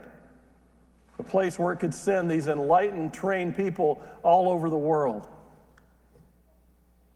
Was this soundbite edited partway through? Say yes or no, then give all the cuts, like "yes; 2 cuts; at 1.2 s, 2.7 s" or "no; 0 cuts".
no; 0 cuts